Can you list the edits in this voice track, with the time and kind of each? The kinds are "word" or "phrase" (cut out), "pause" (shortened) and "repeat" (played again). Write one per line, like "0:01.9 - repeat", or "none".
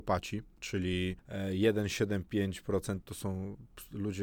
0:03.0 - word